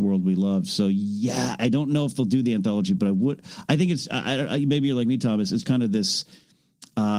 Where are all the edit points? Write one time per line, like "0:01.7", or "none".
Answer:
0:01.6
0:05.6

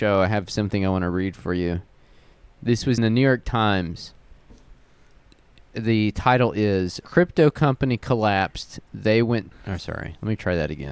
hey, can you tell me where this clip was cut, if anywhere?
0:03.0
0:07.0
0:09.5

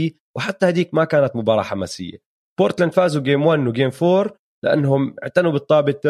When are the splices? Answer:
none

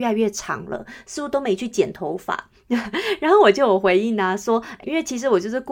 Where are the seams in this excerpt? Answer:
0:04.8

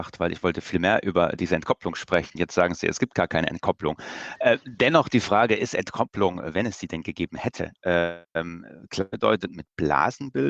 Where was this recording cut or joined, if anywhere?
0:08.2

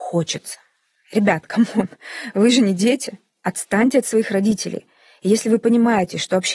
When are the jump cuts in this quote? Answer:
none

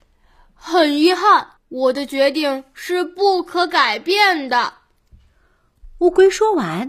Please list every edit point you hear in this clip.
0:01.6

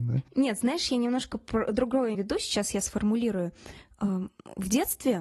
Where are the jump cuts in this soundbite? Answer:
0:02.1

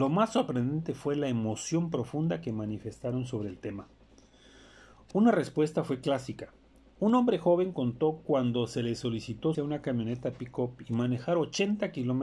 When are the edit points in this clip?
0:09.5

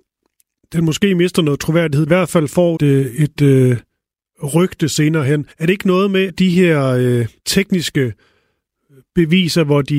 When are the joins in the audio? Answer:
0:02.1
0:02.8
0:03.4
0:05.5
0:06.3
0:07.4

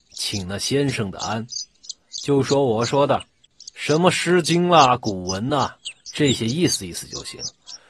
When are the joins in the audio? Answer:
none

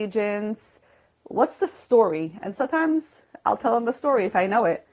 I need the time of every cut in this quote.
none

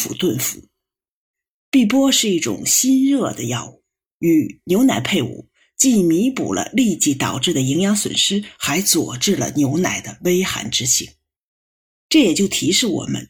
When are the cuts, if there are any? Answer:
none

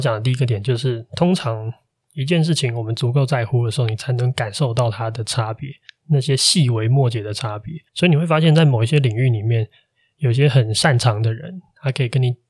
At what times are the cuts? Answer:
0:07.9

